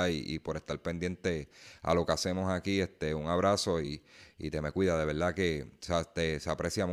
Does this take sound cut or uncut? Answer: uncut